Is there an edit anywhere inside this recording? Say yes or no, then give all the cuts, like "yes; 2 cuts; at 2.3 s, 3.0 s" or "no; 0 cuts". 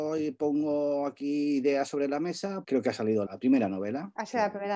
yes; 2 cuts; at 2.6 s, 3.3 s